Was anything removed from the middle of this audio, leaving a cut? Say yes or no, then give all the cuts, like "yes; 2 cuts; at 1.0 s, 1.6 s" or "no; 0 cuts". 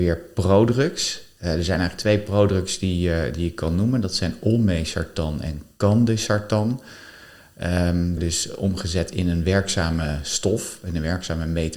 yes; 1 cut; at 8.2 s